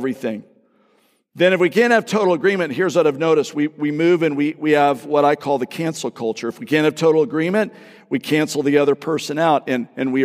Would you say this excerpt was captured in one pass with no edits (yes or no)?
yes